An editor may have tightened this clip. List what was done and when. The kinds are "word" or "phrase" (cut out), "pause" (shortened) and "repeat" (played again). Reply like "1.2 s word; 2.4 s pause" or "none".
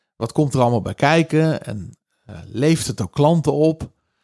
none